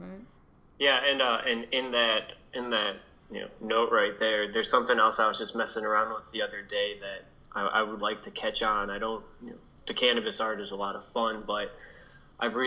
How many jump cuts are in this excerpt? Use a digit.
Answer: 1